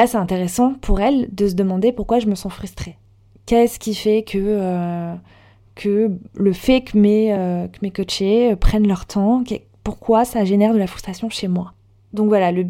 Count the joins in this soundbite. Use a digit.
0